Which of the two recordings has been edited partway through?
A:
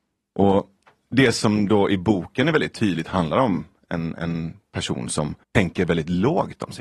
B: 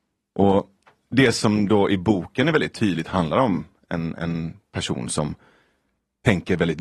A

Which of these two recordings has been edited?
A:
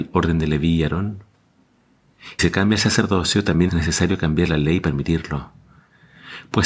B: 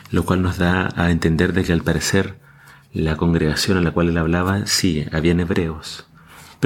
A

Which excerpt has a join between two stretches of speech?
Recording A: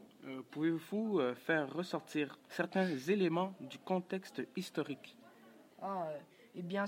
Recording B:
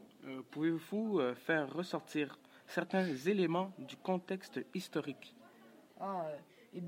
A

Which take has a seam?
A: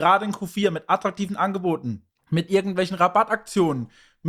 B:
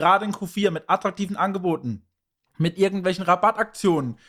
A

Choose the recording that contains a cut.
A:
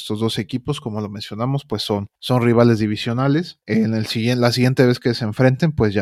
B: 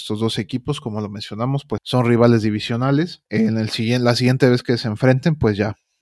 B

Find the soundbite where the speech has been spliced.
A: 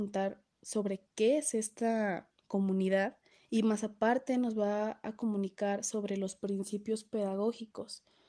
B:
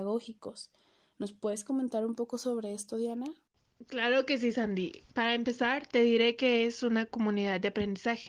A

